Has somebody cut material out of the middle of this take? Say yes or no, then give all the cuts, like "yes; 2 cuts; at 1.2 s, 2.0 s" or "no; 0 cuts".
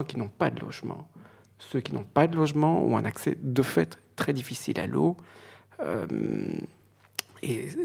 no; 0 cuts